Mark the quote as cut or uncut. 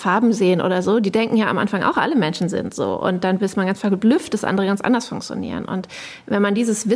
uncut